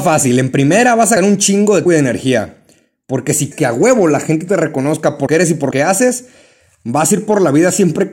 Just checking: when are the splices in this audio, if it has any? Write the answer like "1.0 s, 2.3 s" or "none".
1.2 s, 1.9 s, 3.5 s, 5.3 s, 5.7 s